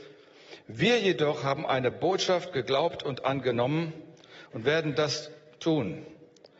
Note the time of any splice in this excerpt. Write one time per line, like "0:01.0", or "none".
none